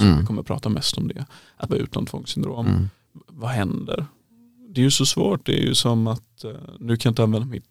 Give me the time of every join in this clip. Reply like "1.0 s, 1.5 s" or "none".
1.7 s